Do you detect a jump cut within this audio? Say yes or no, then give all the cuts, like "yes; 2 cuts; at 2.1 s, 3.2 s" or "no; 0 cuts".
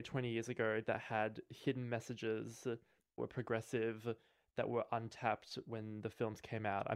yes; 1 cut; at 3.2 s